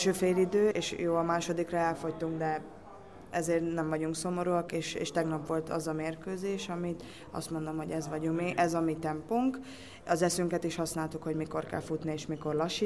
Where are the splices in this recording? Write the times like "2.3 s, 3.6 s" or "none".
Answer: none